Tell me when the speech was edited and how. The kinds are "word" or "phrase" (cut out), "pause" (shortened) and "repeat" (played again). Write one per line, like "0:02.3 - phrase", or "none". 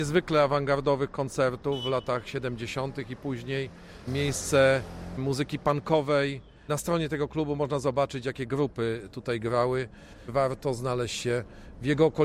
none